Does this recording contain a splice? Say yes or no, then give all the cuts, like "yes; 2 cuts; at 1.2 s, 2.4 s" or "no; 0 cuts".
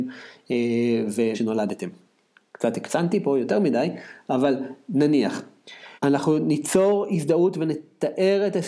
yes; 2 cuts; at 1.3 s, 6.0 s